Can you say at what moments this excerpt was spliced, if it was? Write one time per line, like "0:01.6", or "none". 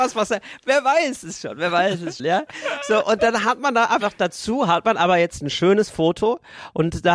0:02.2